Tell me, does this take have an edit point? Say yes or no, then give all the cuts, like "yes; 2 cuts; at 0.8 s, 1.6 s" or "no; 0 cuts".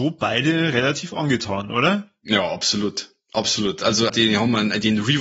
yes; 1 cut; at 4.1 s